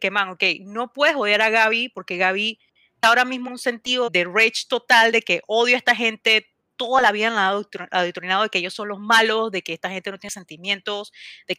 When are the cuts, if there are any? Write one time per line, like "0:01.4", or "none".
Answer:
0:03.0
0:03.5
0:04.1